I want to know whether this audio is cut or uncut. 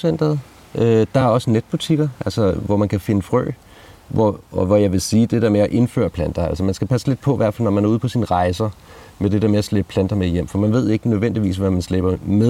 uncut